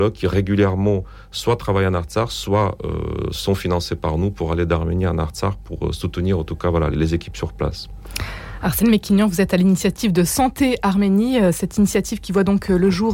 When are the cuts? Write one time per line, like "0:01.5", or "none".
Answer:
0:06.9